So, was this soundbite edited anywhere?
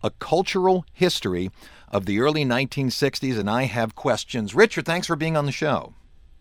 no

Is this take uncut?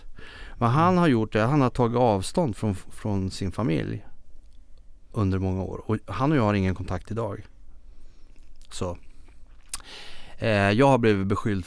yes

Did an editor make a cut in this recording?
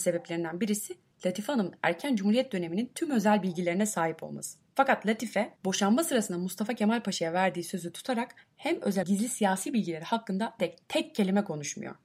yes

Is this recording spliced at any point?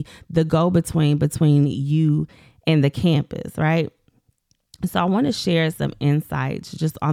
no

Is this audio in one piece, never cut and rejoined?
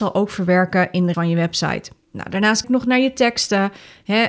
no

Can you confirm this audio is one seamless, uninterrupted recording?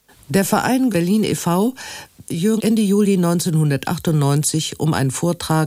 no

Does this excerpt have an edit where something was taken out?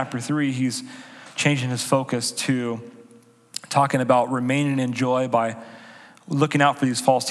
no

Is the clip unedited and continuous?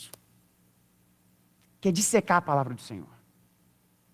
yes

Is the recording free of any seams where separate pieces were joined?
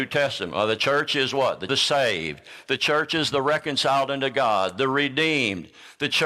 no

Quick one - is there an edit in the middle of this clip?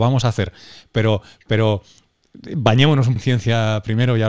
yes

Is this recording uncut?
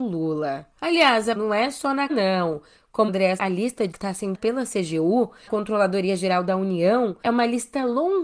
no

